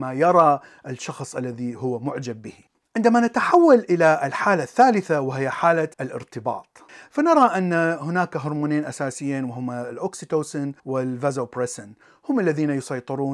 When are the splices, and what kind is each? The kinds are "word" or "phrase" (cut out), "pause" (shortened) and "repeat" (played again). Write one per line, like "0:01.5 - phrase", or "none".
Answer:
0:02.7 - pause
0:05.9 - pause
0:10.8 - pause